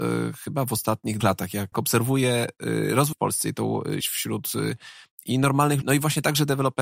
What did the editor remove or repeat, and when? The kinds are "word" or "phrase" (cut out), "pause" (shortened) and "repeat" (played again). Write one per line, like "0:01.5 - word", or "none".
0:01.2 - word
0:01.7 - word
0:03.1 - word
0:04.0 - word
0:05.8 - word